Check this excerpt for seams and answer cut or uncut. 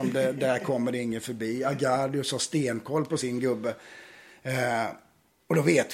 uncut